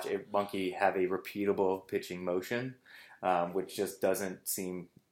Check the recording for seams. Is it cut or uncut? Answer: uncut